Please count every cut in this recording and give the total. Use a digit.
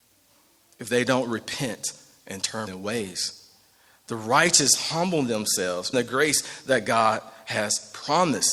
2